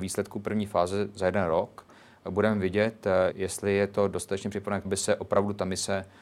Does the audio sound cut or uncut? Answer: cut